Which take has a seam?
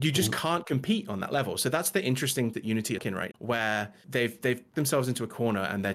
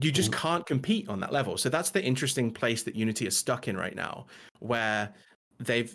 first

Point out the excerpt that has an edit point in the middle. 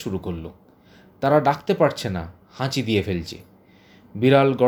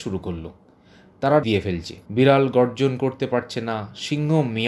second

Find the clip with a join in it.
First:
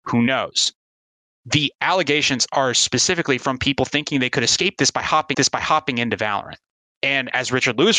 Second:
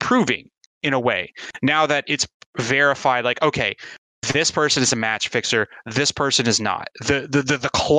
first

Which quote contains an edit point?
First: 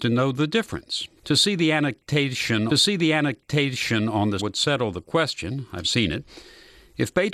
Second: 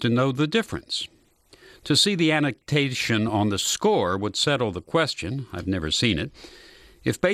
first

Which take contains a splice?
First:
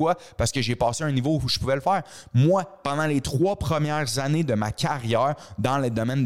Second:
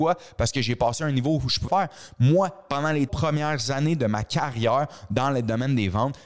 second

